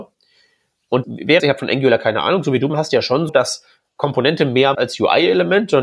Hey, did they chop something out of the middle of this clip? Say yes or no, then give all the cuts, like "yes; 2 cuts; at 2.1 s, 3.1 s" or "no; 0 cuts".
yes; 5 cuts; at 1.0 s, 1.4 s, 2.7 s, 3.3 s, 4.7 s